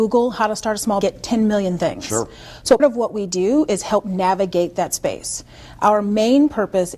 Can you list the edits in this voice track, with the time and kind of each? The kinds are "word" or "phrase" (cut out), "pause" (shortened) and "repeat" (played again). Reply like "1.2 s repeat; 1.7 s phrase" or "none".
1.0 s phrase; 2.8 s word